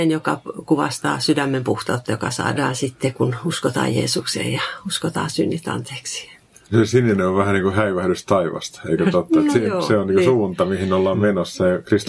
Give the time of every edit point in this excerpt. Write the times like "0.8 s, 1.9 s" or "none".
none